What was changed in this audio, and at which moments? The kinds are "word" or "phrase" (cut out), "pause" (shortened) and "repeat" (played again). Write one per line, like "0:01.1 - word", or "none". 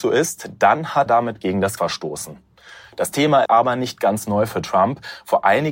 0:01.1 - word
0:01.8 - word
0:03.4 - word